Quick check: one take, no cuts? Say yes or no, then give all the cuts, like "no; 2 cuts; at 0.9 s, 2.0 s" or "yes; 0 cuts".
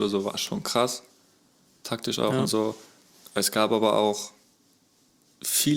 yes; 0 cuts